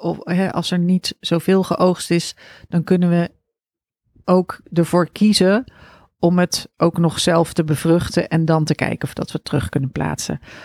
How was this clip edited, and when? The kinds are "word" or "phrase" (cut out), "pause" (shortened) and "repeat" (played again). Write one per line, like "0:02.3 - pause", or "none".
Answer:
none